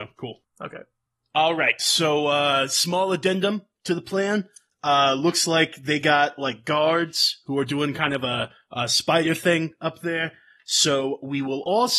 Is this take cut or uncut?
uncut